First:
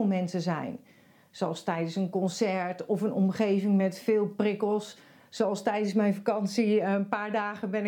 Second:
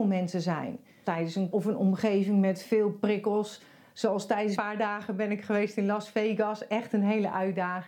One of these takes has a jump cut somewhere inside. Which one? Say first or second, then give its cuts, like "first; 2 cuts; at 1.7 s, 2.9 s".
second; 3 cuts; at 1.0 s, 1.5 s, 4.6 s